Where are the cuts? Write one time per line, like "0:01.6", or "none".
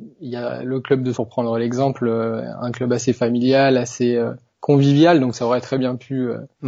0:01.1